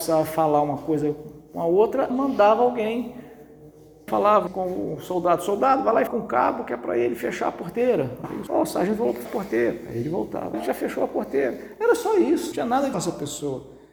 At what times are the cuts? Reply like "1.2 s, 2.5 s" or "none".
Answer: 2.1 s, 4.1 s, 4.5 s, 6.1 s, 8.5 s, 9.2 s, 10.5 s, 12.5 s, 12.9 s

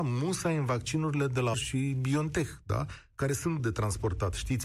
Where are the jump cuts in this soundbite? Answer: 1.5 s, 3.6 s

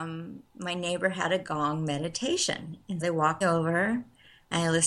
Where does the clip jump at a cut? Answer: 3.0 s, 3.4 s

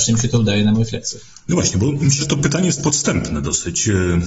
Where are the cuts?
2.2 s

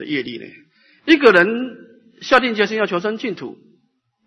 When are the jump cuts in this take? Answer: none

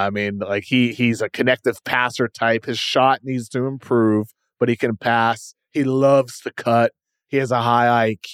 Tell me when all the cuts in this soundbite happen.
none

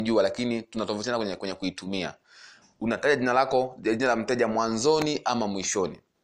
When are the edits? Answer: none

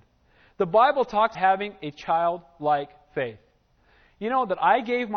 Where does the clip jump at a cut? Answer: 1.3 s

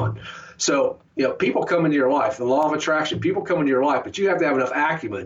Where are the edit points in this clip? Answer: 1.1 s

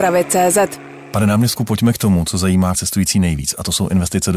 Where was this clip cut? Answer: 2.7 s

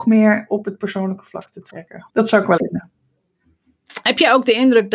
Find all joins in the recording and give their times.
2.1 s, 2.6 s

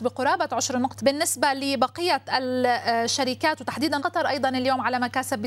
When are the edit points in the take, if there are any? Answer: 1.0 s, 4.0 s

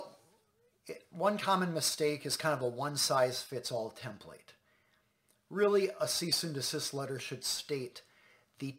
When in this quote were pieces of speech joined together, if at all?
none

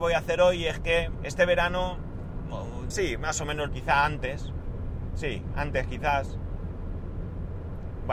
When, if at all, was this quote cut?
1.1 s, 2.9 s, 3.7 s

